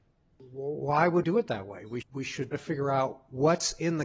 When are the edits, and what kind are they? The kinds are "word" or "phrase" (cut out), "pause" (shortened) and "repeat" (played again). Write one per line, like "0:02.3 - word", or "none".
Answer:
0:01.2 - word
0:02.0 - word
0:02.5 - word